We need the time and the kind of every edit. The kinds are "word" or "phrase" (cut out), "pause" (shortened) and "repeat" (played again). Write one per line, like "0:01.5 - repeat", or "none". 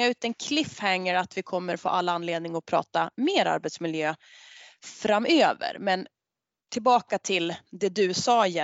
none